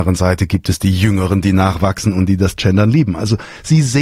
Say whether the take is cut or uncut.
uncut